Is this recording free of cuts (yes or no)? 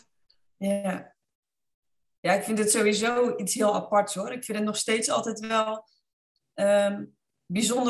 yes